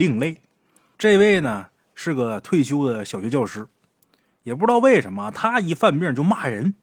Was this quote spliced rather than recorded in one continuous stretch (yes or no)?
no